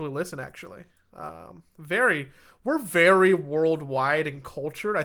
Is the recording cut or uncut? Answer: uncut